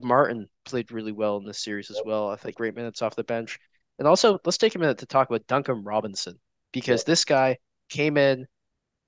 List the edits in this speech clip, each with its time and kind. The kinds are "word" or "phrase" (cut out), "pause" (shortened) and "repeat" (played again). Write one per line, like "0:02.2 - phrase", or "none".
0:02.5 - phrase